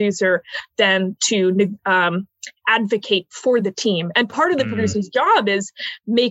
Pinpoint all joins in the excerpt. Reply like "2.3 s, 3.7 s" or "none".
none